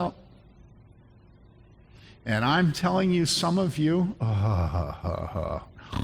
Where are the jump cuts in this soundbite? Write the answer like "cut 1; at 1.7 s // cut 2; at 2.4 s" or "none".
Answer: none